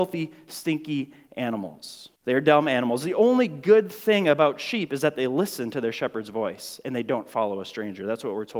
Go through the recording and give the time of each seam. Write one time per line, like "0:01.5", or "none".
0:02.2

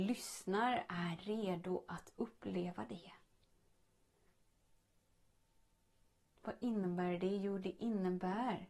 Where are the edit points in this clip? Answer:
none

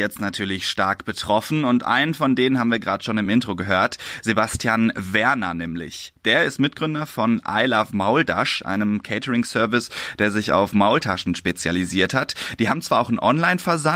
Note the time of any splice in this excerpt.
none

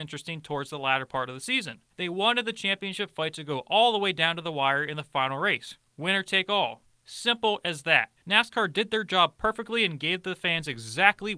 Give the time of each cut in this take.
0:01.9
0:05.9
0:08.2

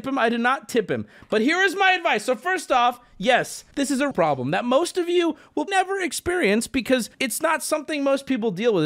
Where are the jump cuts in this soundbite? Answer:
0:03.7
0:04.1
0:05.7
0:07.1

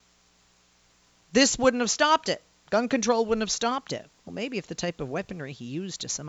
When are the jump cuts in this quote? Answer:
none

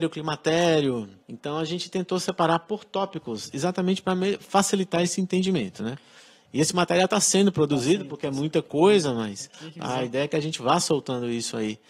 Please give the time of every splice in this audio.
0:01.2

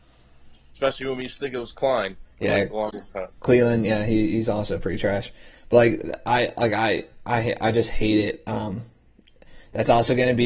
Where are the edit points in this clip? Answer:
none

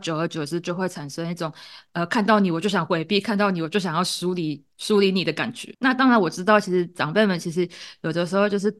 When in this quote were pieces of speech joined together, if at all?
none

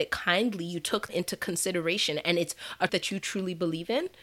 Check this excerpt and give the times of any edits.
0:01.1
0:02.9

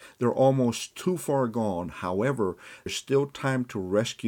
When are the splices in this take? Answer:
0:02.9

